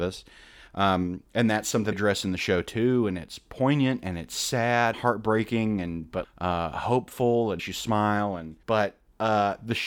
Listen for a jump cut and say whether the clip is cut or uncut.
cut